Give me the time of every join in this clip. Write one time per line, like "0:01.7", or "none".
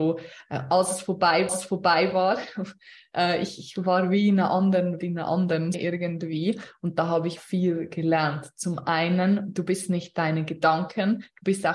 0:01.5
0:05.0
0:05.7
0:07.4

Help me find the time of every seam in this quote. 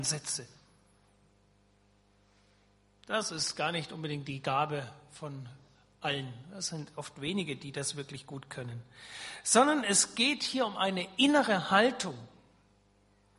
none

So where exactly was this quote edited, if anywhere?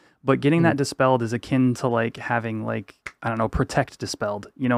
none

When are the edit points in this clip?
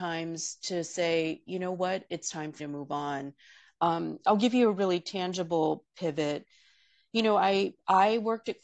0:02.6

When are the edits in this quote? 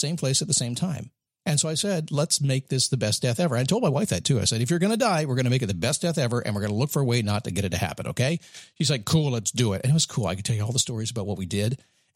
0:01.3

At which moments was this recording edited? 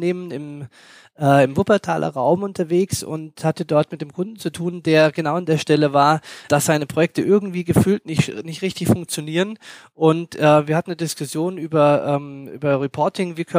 none

